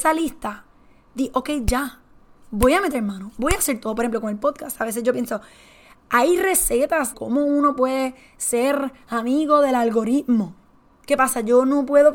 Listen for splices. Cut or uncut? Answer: cut